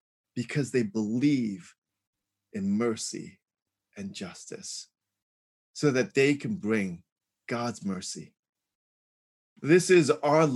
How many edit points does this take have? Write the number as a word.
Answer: zero